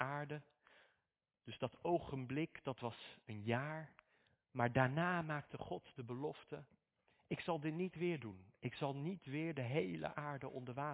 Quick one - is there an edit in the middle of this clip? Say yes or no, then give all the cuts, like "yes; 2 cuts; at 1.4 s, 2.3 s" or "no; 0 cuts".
no; 0 cuts